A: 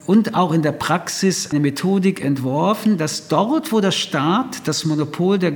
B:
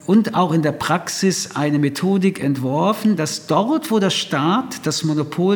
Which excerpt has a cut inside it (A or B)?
A